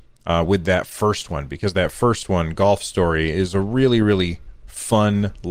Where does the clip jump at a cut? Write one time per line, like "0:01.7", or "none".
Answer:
none